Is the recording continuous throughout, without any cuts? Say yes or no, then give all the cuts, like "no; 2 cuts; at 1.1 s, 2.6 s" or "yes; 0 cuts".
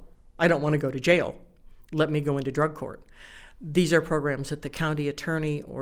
yes; 0 cuts